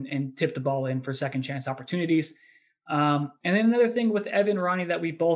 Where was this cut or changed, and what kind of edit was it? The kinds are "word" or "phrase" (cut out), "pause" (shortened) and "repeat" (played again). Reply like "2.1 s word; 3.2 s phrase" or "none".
none